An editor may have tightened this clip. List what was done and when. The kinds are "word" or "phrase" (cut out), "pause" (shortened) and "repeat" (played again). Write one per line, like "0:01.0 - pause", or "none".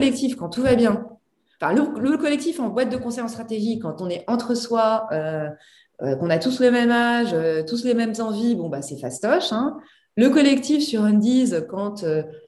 none

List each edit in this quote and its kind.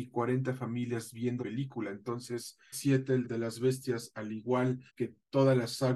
0:01.4 - word
0:02.7 - word
0:03.2 - word
0:04.9 - pause

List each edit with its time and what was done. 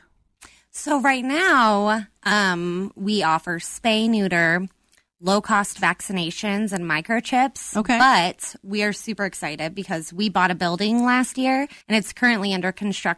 0:11.8 - pause

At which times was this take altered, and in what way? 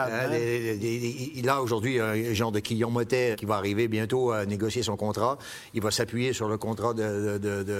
0:03.3 - word

